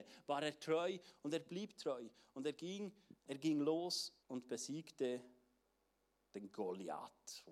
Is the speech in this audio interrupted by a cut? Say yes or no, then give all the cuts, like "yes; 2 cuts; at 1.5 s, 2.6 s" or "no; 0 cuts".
yes; 2 cuts; at 3.2 s, 4.2 s